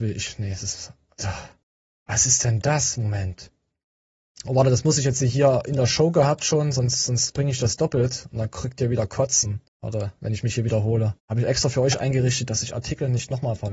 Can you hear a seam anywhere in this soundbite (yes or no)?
yes